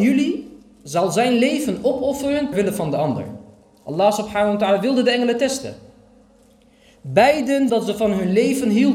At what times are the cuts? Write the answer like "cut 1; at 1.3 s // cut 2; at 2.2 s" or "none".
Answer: cut 1; at 2.5 s // cut 2; at 7.7 s